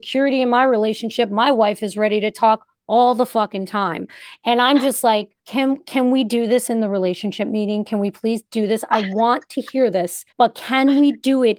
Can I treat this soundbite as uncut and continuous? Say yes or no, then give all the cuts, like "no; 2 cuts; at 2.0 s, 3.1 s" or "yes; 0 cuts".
no; 2 cuts; at 5.4 s, 10.3 s